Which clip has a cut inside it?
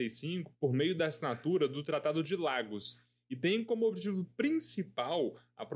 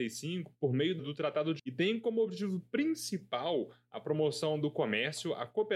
second; 2 cuts; at 1.0 s, 1.6 s

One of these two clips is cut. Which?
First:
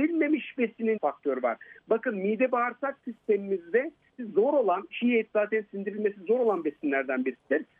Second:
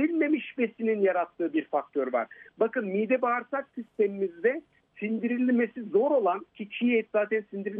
first; 3 cuts; at 1.0 s, 4.2 s, 4.9 s

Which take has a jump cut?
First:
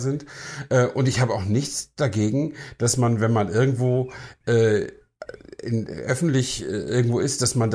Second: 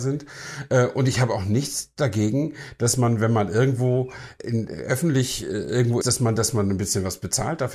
second; 2 cuts; at 4.4 s, 6.0 s

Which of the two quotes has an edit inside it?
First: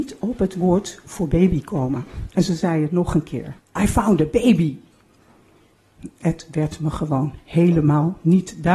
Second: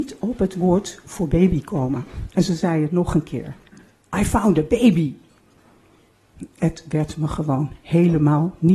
first; 1 cut; at 3.6 s

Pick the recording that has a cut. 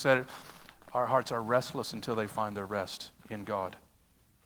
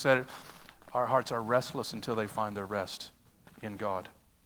first; 1 cut; at 3.2 s

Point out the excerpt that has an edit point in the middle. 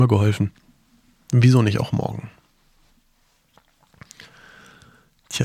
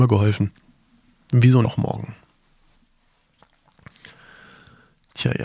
second; 1 cut; at 1.6 s

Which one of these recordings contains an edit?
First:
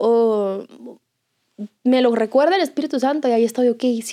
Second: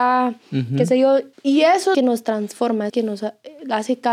second; 3 cuts; at 1.3 s, 1.9 s, 2.9 s

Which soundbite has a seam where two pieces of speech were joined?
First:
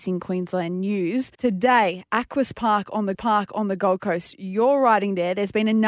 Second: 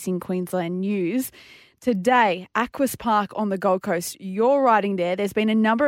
first; 2 cuts; at 1.3 s, 3.1 s

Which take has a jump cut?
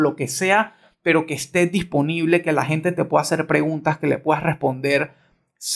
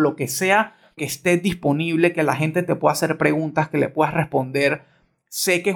second; 1 cut; at 1.0 s

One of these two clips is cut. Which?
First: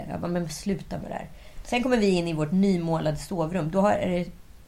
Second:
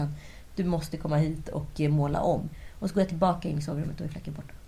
first; 1 cut; at 1.0 s

